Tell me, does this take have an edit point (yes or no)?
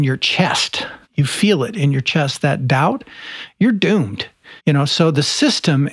yes